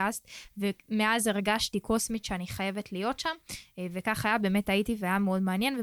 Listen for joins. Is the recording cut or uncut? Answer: uncut